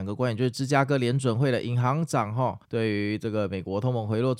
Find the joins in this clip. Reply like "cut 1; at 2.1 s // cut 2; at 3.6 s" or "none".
cut 1; at 2.6 s